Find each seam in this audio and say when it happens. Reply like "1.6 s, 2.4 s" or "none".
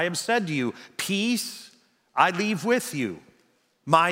none